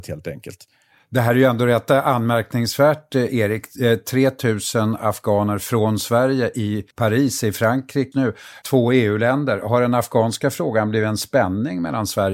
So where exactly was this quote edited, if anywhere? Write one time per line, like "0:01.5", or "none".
0:06.9
0:08.1
0:08.6